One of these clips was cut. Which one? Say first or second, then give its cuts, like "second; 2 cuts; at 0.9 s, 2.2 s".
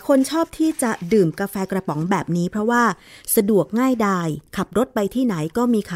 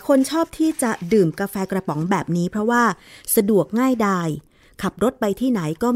first; 1 cut; at 4.5 s